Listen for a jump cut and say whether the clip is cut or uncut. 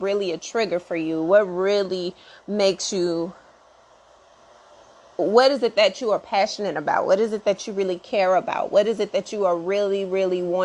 uncut